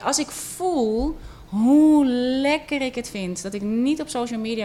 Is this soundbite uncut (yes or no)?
yes